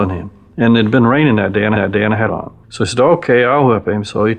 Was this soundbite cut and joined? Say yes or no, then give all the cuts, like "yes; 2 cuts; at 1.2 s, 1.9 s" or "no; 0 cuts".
yes; 3 cuts; at 1.8 s, 2.3 s, 2.6 s